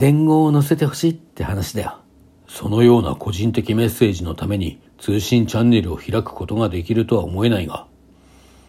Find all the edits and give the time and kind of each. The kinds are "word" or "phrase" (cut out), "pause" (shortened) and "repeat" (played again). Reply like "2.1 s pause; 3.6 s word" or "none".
2.1 s pause; 4.9 s pause